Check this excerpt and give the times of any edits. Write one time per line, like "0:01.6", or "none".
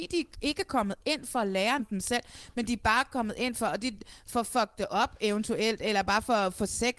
0:01.8